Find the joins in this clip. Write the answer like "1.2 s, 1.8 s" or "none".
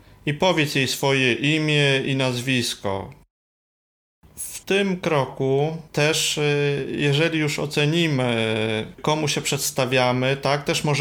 4.6 s